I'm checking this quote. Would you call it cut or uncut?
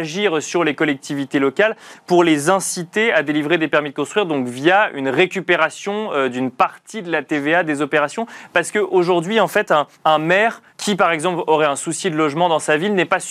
cut